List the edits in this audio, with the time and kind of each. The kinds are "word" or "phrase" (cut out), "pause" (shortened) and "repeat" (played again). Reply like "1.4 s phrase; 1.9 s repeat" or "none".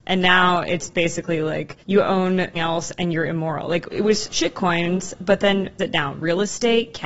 1.8 s pause; 2.5 s word; 3.9 s word; 5.8 s phrase